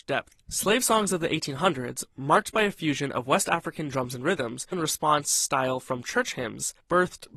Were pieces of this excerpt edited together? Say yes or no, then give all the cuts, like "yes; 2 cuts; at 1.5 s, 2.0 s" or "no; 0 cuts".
yes; 1 cut; at 4.7 s